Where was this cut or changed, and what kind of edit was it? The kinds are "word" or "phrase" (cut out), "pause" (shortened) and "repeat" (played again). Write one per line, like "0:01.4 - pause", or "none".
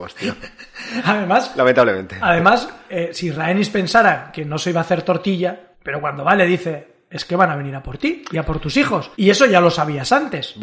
0:05.7 - pause
0:09.1 - pause